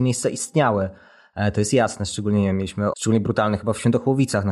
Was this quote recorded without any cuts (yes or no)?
no